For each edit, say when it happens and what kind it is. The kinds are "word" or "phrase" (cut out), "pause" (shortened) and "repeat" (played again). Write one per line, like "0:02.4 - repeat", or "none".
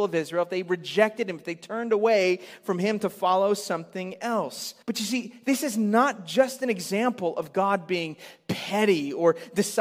0:04.8 - pause